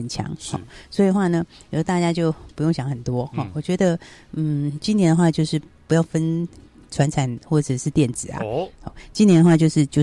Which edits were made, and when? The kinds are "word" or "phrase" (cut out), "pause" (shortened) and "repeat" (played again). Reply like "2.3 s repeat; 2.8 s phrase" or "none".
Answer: none